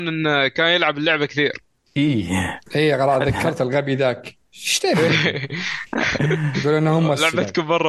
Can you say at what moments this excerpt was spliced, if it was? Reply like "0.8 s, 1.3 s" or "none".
none